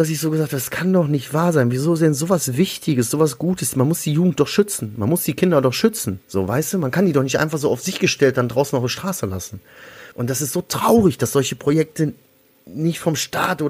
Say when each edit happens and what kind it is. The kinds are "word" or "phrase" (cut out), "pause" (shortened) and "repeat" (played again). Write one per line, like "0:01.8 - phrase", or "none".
0:06.2 - pause
0:10.1 - pause